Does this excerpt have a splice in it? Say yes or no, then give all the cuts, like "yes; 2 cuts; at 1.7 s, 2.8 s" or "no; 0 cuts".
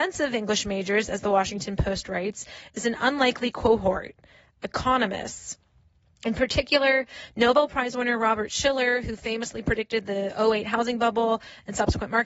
no; 0 cuts